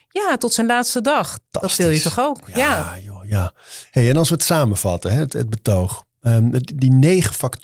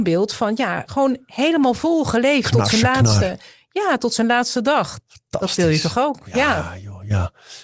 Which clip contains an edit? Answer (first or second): first